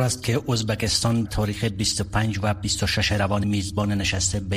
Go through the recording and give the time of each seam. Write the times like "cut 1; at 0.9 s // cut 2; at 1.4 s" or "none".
cut 1; at 1.2 s // cut 2; at 3.1 s // cut 3; at 3.4 s